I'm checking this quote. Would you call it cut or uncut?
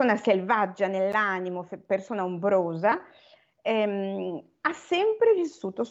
uncut